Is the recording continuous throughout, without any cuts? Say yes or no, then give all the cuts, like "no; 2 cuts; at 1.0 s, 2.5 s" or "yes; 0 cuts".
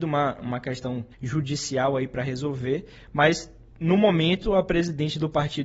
no; 1 cut; at 1.1 s